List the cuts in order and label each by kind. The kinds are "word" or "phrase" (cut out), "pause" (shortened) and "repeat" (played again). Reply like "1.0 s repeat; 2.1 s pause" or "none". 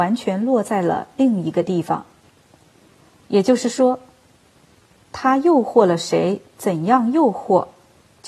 none